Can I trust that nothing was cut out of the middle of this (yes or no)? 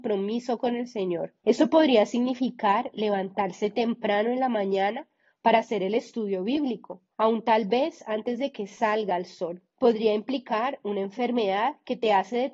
no